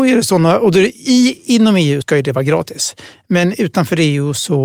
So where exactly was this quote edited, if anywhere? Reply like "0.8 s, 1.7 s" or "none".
2.0 s